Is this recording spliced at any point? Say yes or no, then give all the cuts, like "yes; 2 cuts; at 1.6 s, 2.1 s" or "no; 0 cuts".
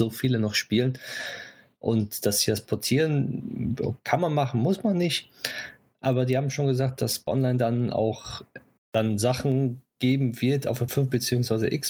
yes; 2 cuts; at 7.3 s, 10.9 s